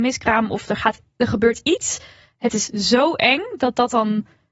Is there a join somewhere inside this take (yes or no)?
no